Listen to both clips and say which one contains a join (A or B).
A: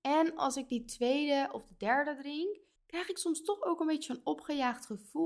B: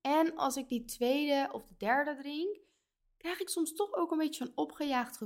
A